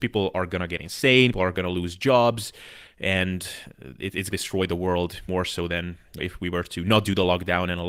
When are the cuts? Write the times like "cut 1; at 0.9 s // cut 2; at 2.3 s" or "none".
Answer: cut 1; at 1.3 s // cut 2; at 4.3 s // cut 3; at 5.3 s // cut 4; at 6.2 s